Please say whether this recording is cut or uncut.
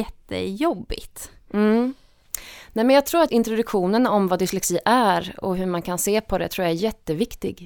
cut